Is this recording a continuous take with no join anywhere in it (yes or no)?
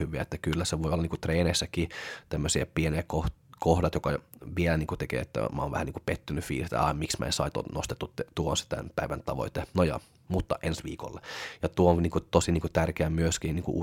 yes